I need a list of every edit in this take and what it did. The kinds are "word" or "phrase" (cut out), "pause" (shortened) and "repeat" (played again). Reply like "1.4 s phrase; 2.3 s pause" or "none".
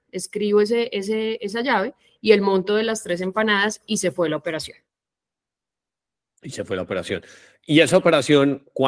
none